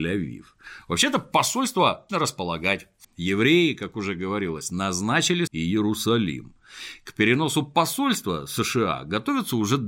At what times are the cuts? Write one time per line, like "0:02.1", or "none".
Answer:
0:02.1
0:03.0
0:05.5